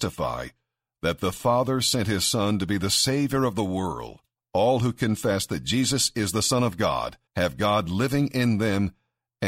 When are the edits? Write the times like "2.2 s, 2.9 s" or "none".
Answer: 4.3 s, 7.3 s